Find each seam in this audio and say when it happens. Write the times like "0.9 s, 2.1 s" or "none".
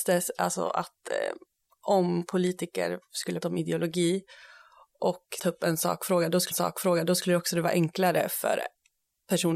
3.4 s, 5.4 s, 6.5 s

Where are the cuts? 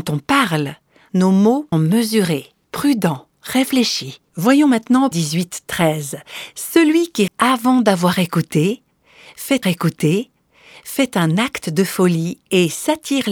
1.7 s, 4.3 s, 5.1 s, 7.3 s, 9.6 s

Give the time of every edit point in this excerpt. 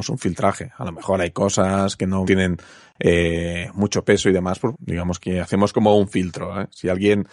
2.3 s, 4.7 s, 5.2 s

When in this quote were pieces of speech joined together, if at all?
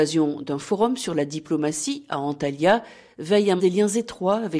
3.6 s

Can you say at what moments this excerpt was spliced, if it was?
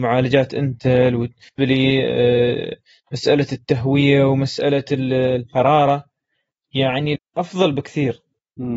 1.6 s, 7.2 s

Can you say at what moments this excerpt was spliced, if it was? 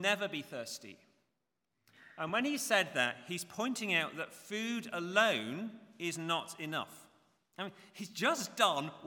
none

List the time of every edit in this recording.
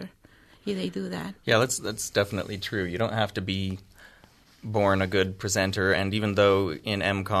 none

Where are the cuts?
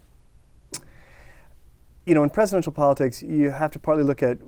2.1 s

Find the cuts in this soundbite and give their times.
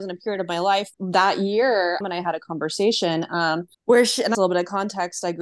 0.9 s, 2.0 s, 3.7 s, 4.3 s

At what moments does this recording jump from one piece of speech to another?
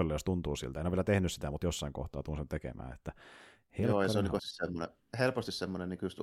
4.4 s

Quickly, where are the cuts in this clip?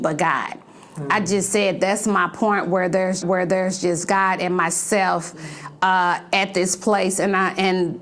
3.2 s

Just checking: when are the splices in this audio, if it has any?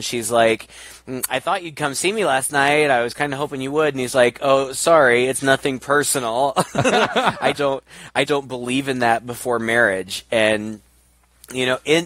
7.5 s, 8.3 s

